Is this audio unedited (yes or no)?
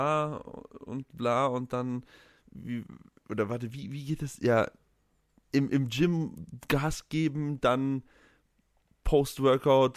yes